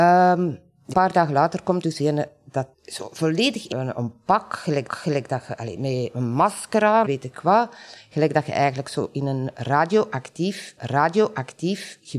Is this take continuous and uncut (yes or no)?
no